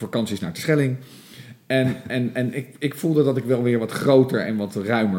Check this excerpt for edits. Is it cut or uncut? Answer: uncut